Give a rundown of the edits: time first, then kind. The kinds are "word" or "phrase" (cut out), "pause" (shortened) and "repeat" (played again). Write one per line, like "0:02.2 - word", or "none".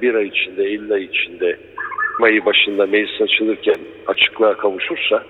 0:02.2 - word